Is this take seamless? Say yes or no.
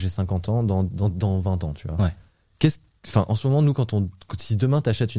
yes